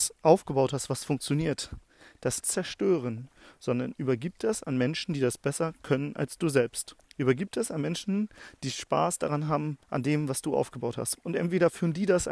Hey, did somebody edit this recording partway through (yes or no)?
yes